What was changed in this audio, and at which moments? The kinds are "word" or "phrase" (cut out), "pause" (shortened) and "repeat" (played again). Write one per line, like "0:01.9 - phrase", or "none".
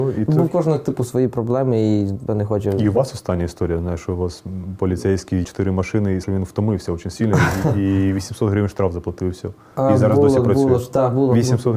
0:02.3 - word
0:05.4 - word
0:06.2 - word